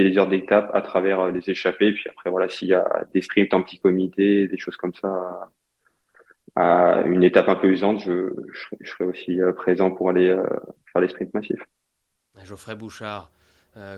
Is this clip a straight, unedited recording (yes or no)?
yes